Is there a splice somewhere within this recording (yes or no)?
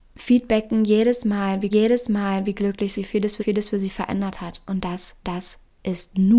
yes